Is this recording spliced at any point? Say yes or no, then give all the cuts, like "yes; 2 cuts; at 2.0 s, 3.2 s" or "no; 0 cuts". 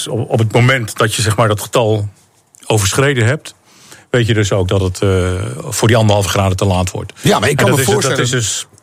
no; 0 cuts